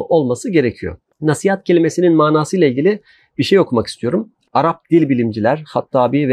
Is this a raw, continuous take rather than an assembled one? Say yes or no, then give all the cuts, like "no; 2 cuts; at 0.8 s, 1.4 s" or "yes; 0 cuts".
yes; 0 cuts